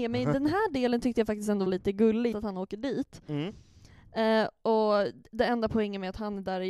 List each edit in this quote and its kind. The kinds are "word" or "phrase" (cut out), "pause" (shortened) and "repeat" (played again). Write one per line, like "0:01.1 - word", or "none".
0:01.7 - word
0:02.3 - word